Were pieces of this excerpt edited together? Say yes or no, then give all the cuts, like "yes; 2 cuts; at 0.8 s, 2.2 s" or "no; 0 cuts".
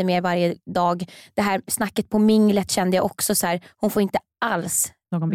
no; 0 cuts